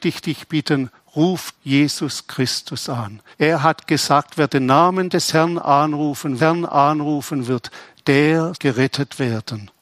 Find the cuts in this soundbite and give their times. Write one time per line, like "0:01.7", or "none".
0:01.5
0:03.3
0:06.4
0:08.5